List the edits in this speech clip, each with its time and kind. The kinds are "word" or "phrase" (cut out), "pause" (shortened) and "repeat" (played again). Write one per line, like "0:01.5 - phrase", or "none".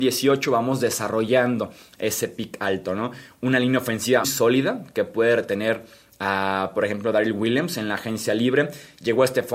0:04.2 - word